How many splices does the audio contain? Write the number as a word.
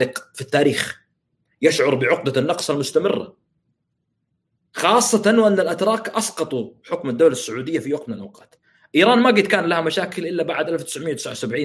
zero